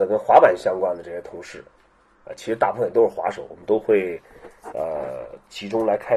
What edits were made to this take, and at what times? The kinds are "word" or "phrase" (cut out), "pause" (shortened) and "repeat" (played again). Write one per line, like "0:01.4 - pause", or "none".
none